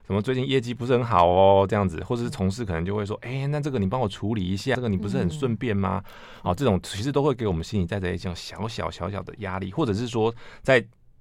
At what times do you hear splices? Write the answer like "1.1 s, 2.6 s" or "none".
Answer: 4.7 s